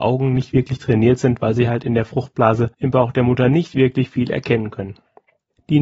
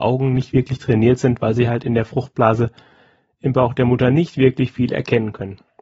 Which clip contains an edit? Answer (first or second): first